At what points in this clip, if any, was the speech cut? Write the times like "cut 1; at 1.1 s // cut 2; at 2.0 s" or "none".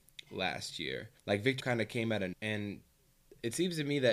cut 1; at 1.2 s // cut 2; at 1.6 s // cut 3; at 2.3 s